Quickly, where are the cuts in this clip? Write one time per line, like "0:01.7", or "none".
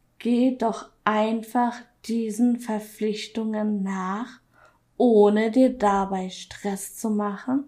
none